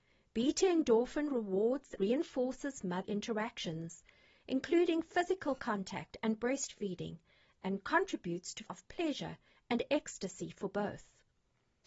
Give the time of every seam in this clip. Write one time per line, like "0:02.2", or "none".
0:02.0
0:03.0
0:08.7